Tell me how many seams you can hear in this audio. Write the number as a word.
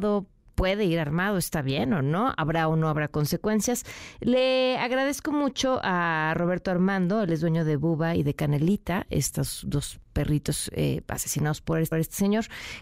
one